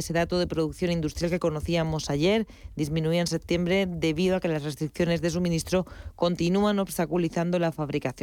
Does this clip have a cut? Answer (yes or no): no